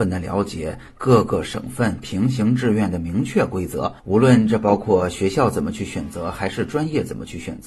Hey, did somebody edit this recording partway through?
yes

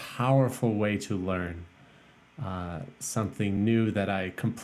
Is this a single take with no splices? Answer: yes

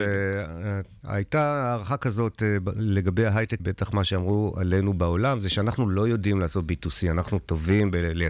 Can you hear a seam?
yes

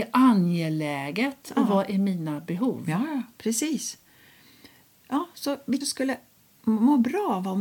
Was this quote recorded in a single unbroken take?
no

